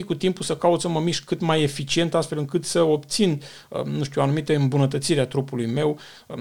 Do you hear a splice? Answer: no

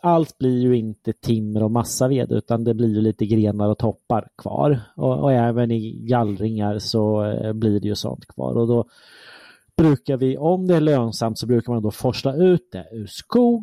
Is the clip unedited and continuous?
yes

